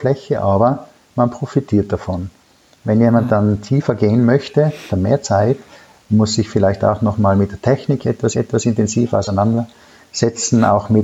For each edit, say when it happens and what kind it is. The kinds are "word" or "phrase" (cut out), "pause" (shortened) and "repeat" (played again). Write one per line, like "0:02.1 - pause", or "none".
0:04.9 - phrase
0:08.3 - repeat